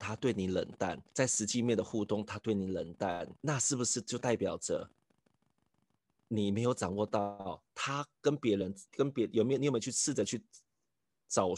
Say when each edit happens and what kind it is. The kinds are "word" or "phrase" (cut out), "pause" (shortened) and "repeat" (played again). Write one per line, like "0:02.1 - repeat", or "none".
0:01.1 - pause
0:03.4 - pause
0:08.9 - pause